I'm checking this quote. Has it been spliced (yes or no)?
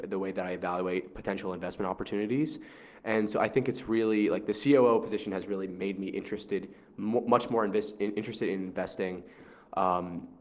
no